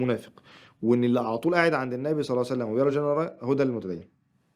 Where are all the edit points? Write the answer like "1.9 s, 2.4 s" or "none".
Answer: none